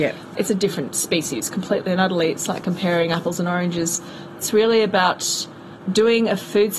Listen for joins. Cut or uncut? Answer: uncut